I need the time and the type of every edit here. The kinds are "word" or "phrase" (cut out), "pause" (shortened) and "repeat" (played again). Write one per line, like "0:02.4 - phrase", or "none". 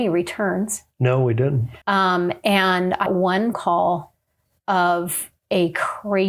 0:01.8 - pause
0:03.1 - word
0:03.5 - word